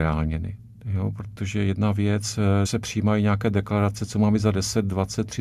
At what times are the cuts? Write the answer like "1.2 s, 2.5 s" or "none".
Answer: 2.7 s